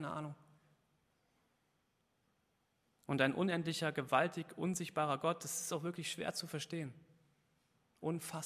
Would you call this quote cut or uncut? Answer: uncut